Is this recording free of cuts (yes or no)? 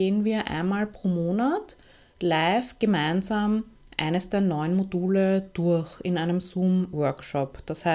yes